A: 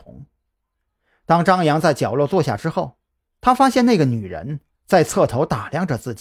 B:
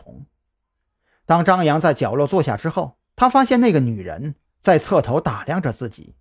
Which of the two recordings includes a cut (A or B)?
B